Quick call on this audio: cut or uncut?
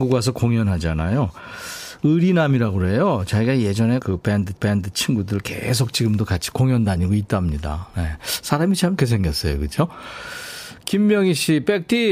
cut